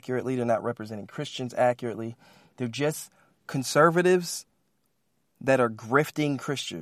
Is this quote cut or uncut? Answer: uncut